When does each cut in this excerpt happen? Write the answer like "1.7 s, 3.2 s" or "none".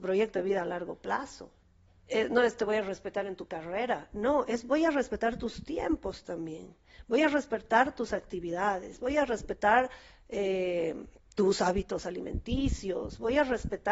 1.6 s, 11.2 s